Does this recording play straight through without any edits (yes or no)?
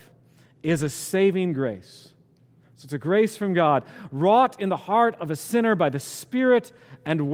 yes